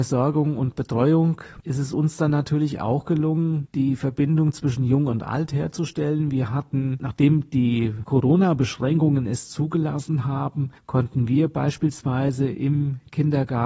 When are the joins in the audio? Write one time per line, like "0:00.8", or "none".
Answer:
0:10.8